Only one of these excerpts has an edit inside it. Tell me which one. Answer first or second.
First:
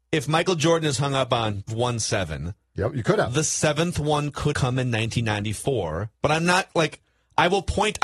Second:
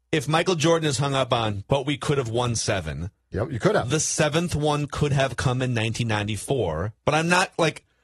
first